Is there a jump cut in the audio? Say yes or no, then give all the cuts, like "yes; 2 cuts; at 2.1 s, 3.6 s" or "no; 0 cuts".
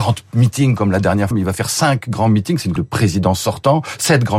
yes; 2 cuts; at 1.3 s, 2.8 s